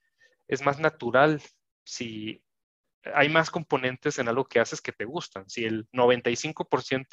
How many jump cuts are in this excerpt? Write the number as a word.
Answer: zero